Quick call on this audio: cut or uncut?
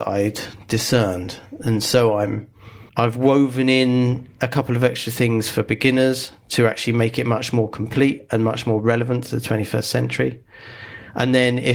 cut